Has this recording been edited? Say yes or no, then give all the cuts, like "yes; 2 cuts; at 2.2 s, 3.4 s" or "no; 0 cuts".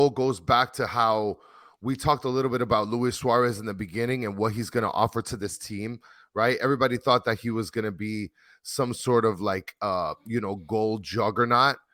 no; 0 cuts